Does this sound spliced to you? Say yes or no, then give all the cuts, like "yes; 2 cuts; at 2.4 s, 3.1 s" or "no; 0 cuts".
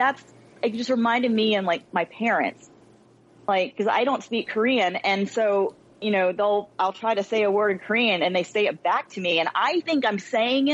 yes; 1 cut; at 5.9 s